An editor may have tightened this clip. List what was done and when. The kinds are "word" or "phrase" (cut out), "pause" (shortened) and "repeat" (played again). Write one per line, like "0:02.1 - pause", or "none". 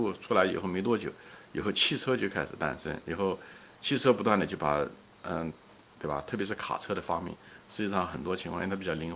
none